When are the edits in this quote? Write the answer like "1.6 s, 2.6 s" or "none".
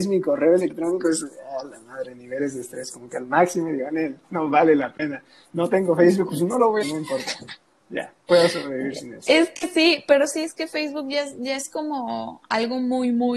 6.8 s